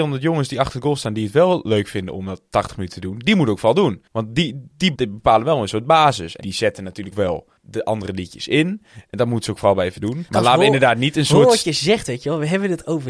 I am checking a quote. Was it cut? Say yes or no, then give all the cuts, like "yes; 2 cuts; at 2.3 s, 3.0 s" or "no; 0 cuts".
yes; 6 cuts; at 4.1 s, 5.0 s, 6.4 s, 7.1 s, 7.6 s, 10.3 s